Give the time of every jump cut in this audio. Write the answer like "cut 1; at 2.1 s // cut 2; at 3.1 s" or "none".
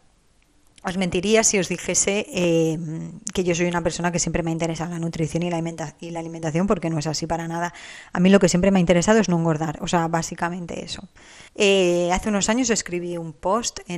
cut 1; at 11.5 s